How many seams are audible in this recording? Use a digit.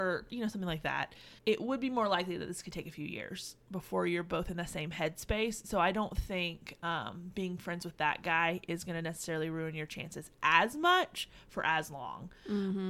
1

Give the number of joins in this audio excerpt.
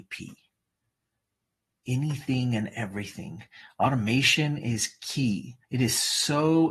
1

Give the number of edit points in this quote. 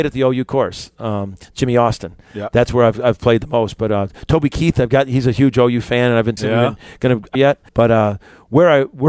3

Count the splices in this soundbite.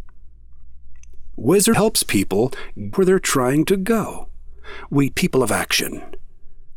3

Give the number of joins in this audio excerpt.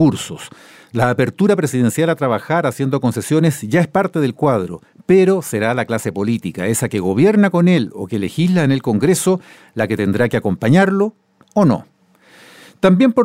0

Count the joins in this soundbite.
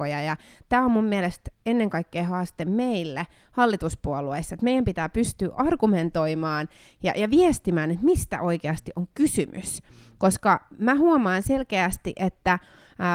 0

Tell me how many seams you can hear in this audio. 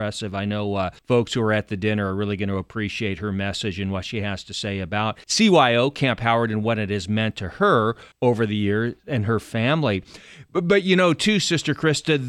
3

